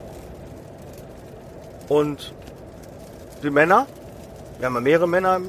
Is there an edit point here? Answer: no; 0 cuts

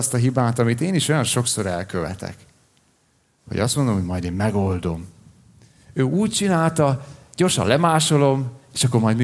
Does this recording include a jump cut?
no; 0 cuts

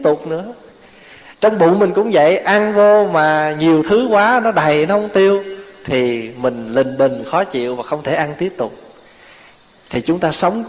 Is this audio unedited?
yes; 0 cuts

